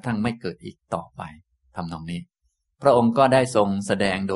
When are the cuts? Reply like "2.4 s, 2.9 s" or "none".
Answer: none